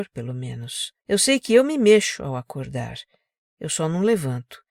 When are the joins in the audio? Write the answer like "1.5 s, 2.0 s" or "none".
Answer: 1.0 s